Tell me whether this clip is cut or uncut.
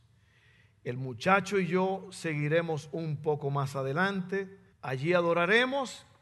cut